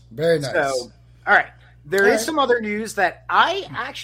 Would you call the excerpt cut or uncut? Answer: uncut